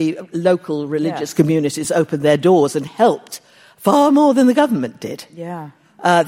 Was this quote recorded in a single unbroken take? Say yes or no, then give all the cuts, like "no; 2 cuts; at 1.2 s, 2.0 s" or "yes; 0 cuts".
yes; 0 cuts